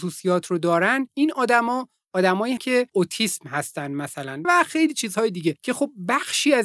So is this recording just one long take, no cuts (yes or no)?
no